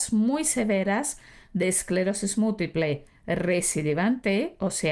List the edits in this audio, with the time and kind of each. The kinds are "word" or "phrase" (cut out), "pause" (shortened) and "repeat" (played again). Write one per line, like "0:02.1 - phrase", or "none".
none